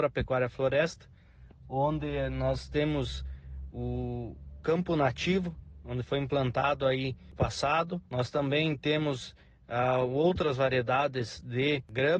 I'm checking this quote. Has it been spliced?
yes; 2 cuts; at 7.4 s, 8.1 s

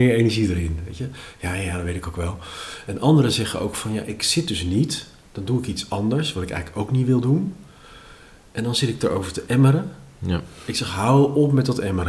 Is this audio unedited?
yes; 0 cuts

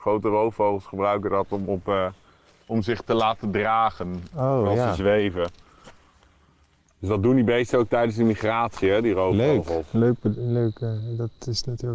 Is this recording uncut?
yes; 0 cuts

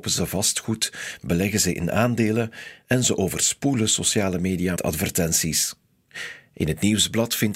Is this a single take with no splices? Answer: no; 1 cut; at 4.8 s

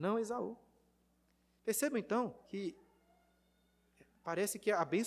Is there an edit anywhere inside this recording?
yes; 1 cut; at 2.4 s

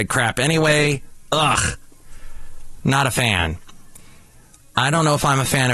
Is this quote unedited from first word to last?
no; 1 cut; at 4.6 s

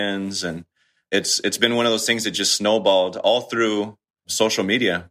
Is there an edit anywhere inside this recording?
no; 0 cuts

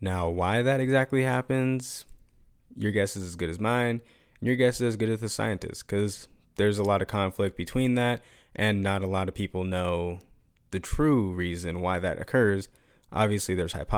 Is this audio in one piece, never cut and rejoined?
yes; 0 cuts

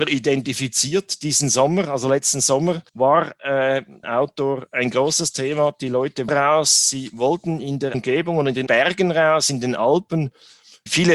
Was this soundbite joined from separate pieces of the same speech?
yes; 5 cuts; at 2.9 s, 4.0 s, 6.3 s, 7.9 s, 8.7 s

